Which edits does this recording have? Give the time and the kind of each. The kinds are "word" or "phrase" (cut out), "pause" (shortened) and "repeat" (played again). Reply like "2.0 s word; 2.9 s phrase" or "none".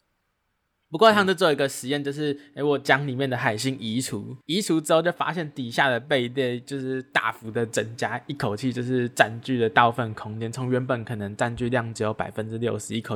4.4 s pause